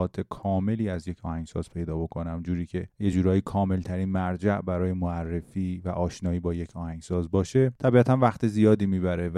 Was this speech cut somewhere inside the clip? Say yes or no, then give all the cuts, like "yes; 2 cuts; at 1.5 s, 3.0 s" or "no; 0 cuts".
no; 0 cuts